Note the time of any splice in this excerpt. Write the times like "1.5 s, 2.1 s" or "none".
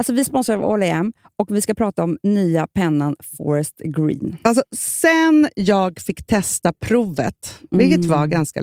none